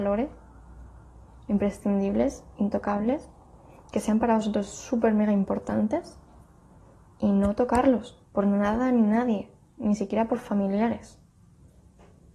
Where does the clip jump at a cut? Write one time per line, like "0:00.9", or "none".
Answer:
0:08.2